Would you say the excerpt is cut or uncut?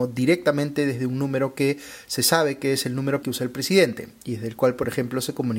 cut